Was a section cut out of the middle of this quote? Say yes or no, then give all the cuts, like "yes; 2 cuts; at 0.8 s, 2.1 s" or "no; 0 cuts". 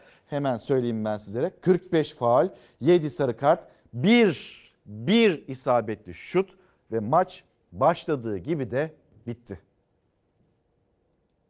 no; 0 cuts